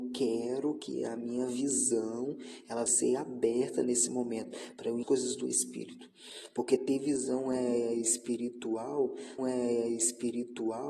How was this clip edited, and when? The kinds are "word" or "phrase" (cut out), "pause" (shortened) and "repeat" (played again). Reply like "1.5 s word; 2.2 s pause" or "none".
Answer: 2.9 s word; 5.0 s phrase; 9.4 s repeat